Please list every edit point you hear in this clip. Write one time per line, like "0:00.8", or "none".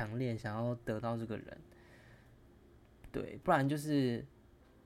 none